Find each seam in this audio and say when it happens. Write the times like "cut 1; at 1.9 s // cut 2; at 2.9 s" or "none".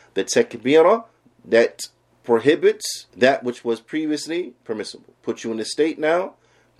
cut 1; at 1.2 s // cut 2; at 3.1 s // cut 3; at 5.2 s